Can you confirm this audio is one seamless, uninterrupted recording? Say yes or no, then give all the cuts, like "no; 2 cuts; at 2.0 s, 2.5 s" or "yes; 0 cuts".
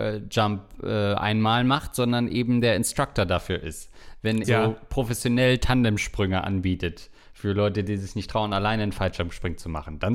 no; 1 cut; at 4.4 s